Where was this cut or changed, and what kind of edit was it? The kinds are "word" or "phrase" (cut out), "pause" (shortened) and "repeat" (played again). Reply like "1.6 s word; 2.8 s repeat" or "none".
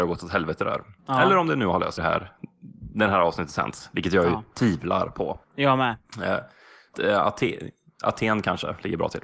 1.0 s pause; 2.0 s phrase; 5.4 s pause; 6.9 s word